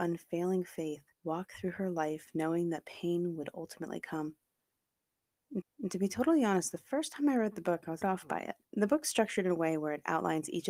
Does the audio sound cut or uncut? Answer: cut